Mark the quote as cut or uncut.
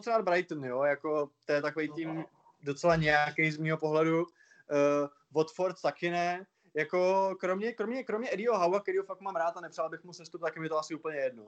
uncut